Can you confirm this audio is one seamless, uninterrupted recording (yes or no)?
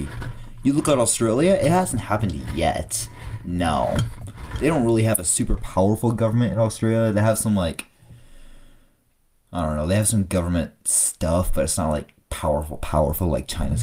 yes